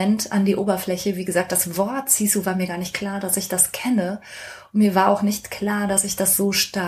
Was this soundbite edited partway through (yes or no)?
no